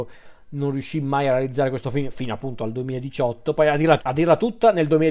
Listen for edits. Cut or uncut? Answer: cut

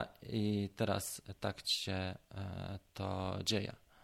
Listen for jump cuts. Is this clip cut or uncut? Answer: uncut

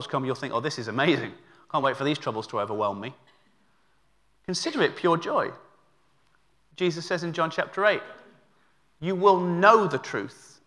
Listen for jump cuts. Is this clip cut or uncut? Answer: uncut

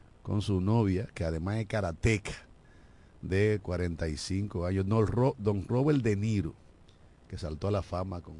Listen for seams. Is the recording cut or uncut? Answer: uncut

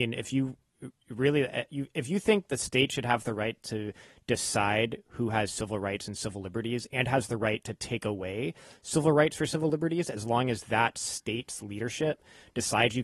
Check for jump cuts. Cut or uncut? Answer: uncut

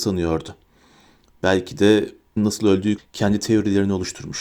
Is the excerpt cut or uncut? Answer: cut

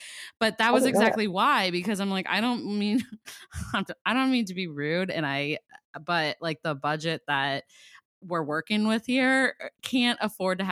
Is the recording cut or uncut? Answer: uncut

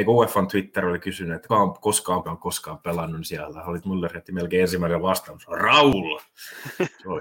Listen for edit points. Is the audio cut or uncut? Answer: cut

